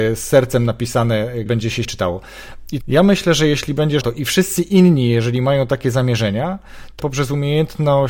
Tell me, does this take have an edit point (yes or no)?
yes